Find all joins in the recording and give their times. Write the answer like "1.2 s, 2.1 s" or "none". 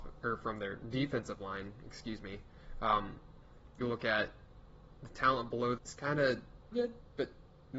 3.8 s, 5.8 s, 6.7 s